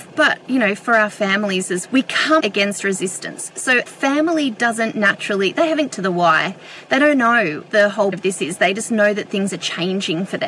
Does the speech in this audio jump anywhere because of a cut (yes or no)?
yes